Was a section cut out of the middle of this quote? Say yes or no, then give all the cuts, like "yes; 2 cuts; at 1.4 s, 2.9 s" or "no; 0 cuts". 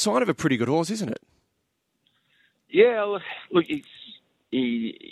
no; 0 cuts